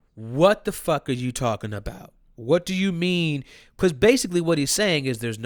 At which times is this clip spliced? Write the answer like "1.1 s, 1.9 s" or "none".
2.3 s